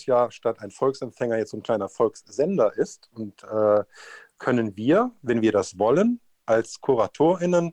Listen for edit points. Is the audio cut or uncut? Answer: uncut